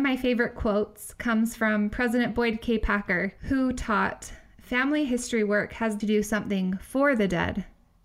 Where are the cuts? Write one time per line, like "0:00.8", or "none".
0:06.0